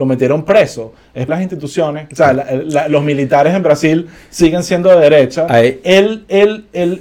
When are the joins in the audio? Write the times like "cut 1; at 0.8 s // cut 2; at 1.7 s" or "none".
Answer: cut 1; at 1.3 s